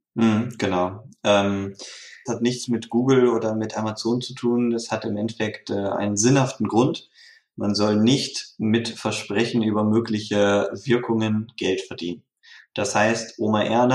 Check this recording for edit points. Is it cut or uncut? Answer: cut